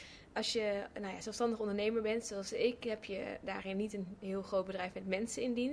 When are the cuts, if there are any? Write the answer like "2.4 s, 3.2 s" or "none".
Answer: none